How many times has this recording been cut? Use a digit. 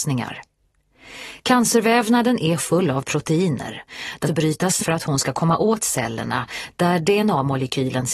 3